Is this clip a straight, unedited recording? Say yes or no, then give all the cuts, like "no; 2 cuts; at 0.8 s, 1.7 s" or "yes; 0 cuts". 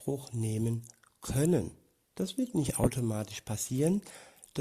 yes; 0 cuts